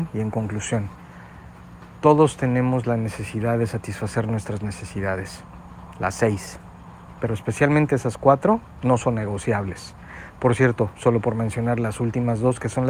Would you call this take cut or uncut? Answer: uncut